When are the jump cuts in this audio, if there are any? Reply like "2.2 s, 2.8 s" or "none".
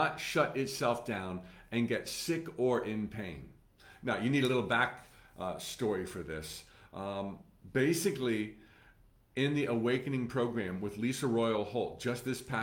none